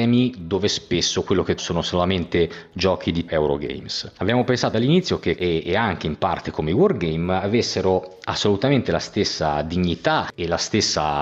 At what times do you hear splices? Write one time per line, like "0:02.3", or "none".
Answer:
0:01.6
0:03.3
0:04.7
0:05.4